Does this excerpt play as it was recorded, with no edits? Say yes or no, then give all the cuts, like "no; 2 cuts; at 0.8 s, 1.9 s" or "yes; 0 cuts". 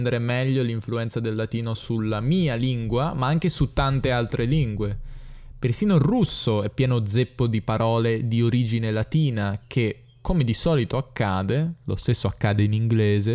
yes; 0 cuts